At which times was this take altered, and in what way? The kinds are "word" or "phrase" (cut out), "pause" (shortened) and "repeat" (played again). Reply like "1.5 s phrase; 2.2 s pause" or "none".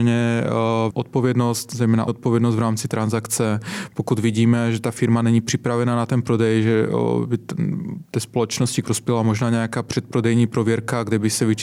0.9 s word; 2.1 s word; 8.8 s word